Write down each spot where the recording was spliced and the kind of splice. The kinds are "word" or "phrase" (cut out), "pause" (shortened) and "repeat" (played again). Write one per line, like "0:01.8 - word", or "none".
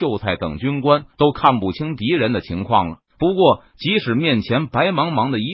0:03.1 - pause